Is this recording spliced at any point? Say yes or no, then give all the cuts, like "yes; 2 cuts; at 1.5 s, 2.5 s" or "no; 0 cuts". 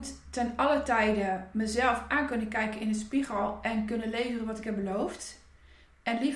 no; 0 cuts